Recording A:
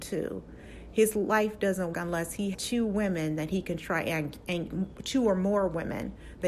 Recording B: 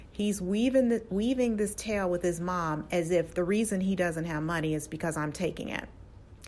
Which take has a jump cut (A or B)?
A